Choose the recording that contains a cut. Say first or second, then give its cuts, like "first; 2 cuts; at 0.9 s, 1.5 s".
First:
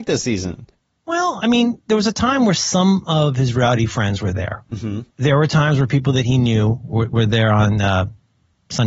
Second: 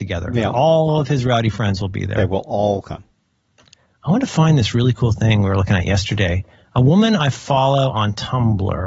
first; 1 cut; at 5.1 s